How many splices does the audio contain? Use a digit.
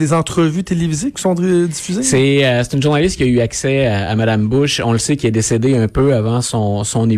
1